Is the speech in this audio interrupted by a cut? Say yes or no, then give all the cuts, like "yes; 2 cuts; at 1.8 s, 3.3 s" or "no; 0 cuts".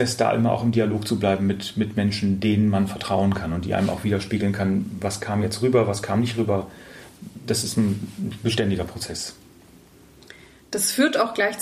no; 0 cuts